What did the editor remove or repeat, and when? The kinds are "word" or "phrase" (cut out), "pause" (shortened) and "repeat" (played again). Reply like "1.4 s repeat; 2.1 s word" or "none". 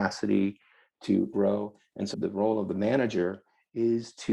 1.3 s phrase; 2.1 s word